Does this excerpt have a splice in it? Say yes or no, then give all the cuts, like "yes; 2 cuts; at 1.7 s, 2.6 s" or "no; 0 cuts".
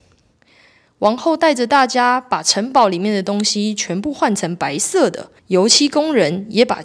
yes; 1 cut; at 5.4 s